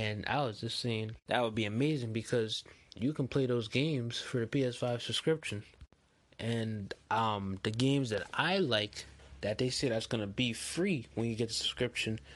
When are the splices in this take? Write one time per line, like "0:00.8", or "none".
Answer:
none